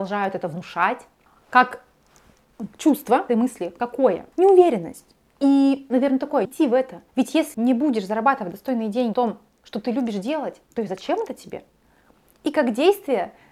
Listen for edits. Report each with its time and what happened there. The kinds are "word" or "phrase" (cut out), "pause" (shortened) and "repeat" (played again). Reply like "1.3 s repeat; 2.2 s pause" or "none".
1.3 s pause; 3.3 s phrase; 4.3 s pause; 6.4 s word; 7.1 s pause; 7.5 s word; 9.1 s word; 10.7 s pause